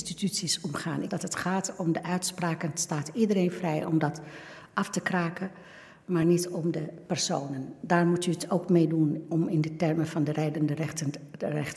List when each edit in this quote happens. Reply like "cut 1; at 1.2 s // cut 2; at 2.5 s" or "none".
none